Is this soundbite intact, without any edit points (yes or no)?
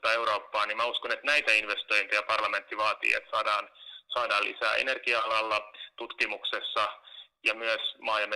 yes